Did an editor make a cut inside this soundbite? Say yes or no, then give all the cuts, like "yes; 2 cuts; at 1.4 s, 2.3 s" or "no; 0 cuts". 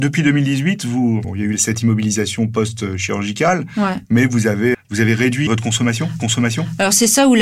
yes; 4 cuts; at 1.2 s, 4.7 s, 5.5 s, 6.2 s